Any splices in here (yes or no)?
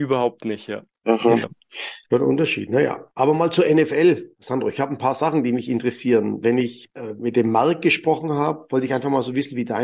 no